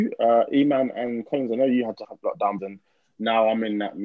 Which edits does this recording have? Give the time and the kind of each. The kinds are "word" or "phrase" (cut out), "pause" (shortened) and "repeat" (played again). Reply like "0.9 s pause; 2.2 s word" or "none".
2.0 s word; 2.6 s word